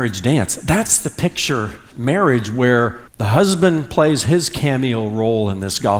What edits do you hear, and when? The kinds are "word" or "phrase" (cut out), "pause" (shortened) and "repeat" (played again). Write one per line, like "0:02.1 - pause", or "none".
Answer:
0:01.9 - phrase
0:03.1 - pause